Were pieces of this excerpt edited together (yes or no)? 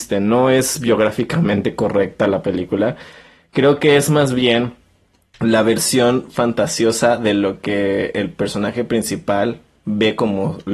no